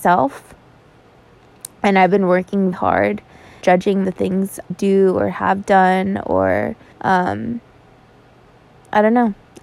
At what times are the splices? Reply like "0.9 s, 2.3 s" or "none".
2.7 s, 3.6 s, 4.0 s, 4.7 s, 6.9 s